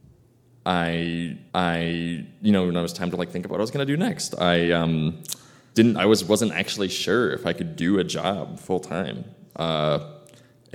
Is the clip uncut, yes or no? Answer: no